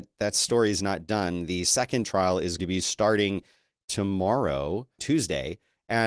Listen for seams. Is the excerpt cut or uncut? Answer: cut